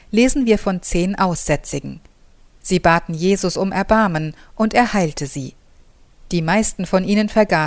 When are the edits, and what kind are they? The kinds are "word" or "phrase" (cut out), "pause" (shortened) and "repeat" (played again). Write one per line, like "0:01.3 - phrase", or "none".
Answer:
none